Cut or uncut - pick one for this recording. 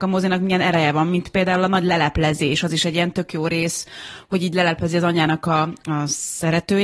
uncut